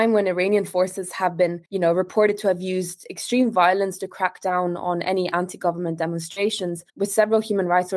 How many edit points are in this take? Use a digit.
2